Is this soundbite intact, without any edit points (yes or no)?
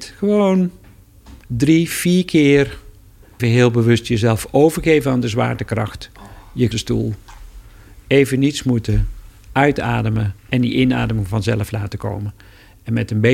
no